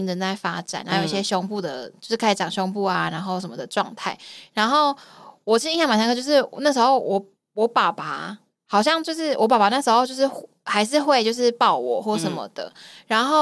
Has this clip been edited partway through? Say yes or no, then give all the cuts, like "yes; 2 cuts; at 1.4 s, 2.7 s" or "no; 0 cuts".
no; 0 cuts